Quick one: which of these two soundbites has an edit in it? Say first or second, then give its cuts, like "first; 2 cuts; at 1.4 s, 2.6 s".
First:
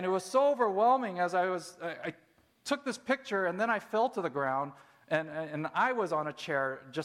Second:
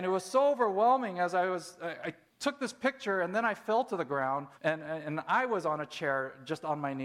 second; 2 cuts; at 2.3 s, 4.6 s